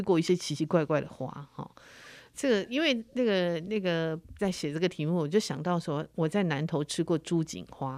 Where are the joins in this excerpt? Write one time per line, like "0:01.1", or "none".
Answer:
0:02.3
0:04.4